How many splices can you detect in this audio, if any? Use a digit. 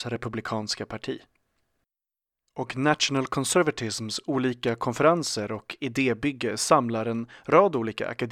0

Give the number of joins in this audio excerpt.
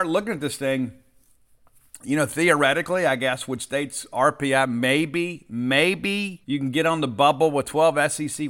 1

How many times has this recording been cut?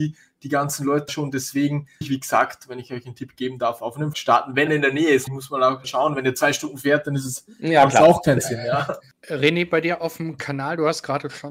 6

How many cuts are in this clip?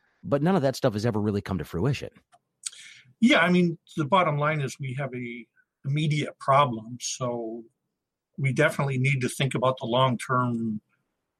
0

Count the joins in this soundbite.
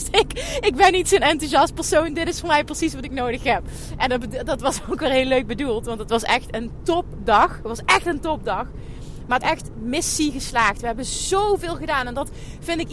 1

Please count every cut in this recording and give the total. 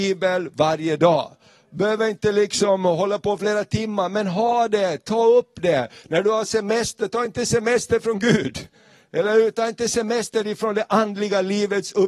0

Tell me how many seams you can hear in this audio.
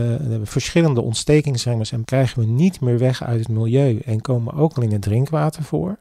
1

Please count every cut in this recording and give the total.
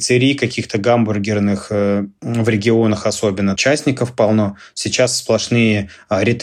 1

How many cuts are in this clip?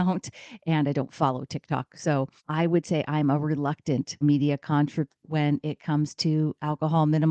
3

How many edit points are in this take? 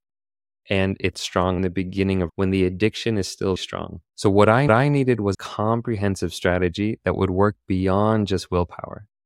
7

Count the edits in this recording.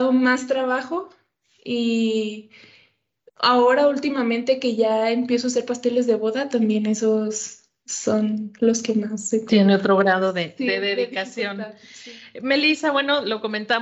0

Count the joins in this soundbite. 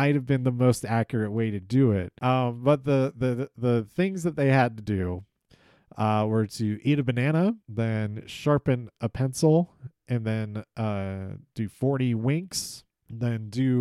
1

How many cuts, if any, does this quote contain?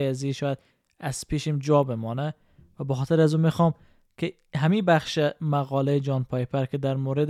0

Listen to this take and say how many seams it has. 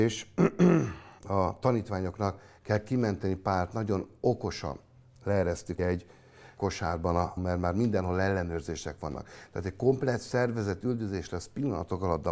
4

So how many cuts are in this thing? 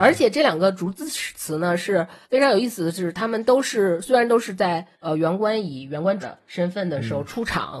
3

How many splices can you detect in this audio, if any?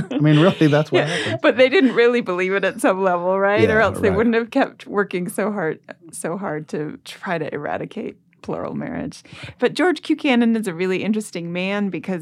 1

